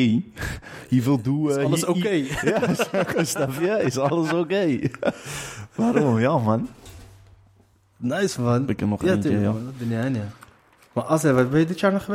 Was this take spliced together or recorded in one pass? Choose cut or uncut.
uncut